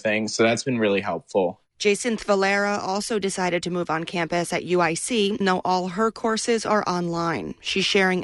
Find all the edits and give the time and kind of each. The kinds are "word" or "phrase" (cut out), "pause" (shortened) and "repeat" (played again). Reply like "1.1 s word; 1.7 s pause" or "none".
5.4 s word